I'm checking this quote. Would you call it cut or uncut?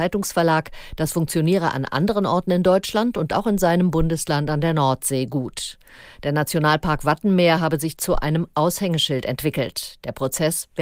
uncut